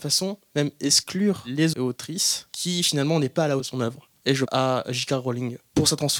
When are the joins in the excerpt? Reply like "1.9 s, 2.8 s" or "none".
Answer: 1.7 s, 3.6 s, 4.5 s